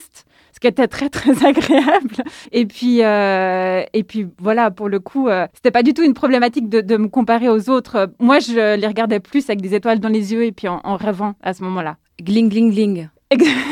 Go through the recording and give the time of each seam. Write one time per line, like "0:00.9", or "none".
0:02.4
0:05.5